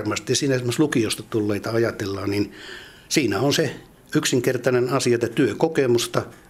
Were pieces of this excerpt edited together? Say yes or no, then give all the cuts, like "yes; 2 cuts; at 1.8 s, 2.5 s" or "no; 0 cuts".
no; 0 cuts